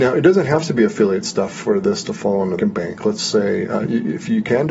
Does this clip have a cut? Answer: yes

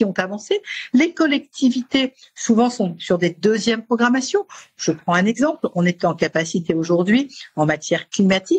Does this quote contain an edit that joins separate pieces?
no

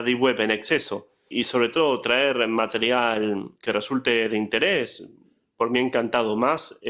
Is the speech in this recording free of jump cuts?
no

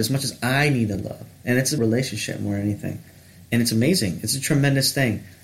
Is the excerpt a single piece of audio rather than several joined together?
no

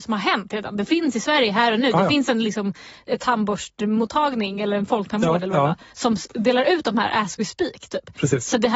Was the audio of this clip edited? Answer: no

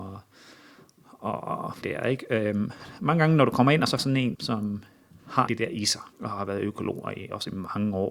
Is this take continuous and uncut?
no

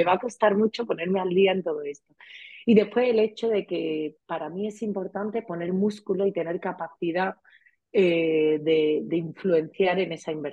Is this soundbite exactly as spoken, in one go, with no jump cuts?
yes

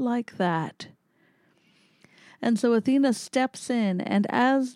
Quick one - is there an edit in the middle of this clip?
no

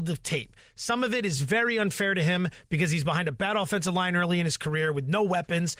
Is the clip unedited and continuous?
yes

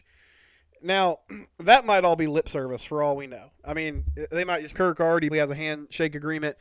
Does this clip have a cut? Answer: yes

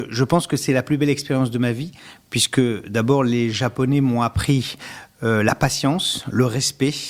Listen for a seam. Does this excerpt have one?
no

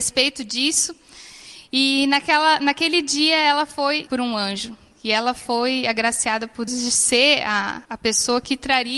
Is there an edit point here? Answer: yes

